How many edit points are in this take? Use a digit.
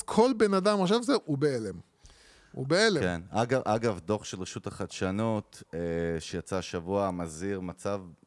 0